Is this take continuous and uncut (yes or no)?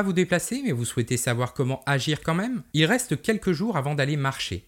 yes